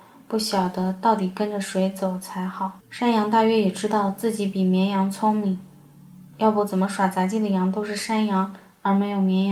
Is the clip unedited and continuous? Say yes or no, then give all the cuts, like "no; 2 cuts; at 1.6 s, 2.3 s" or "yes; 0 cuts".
no; 1 cut; at 2.8 s